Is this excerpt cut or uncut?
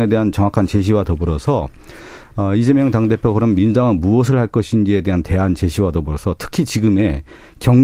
uncut